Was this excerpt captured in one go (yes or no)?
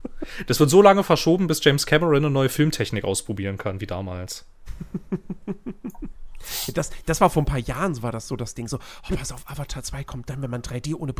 yes